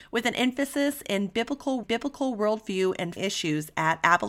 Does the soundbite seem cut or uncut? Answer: cut